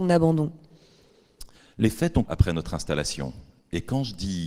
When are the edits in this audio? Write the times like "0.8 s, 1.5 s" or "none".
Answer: 1.6 s, 2.3 s

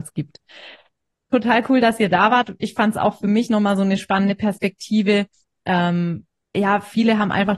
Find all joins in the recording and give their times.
none

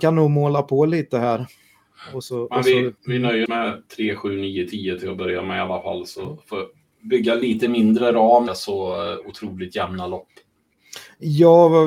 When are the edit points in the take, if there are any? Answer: 3.0 s, 3.5 s, 8.5 s

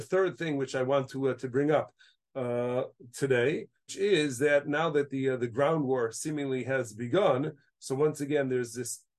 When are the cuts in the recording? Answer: 3.9 s

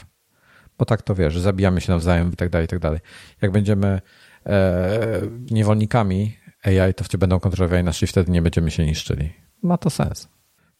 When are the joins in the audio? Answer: 2.3 s, 5.5 s, 7.1 s, 8.0 s

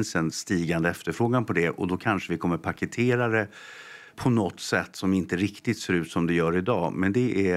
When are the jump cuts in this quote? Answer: 4.1 s

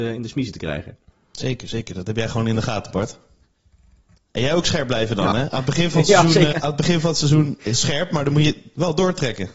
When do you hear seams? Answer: 6.5 s

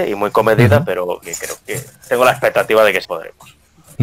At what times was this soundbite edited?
1.2 s, 1.6 s, 3.0 s

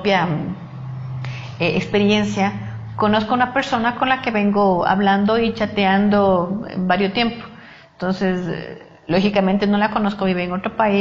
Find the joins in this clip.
none

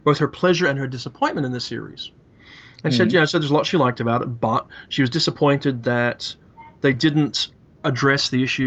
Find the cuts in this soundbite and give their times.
none

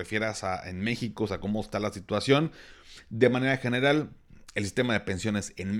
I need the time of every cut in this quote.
none

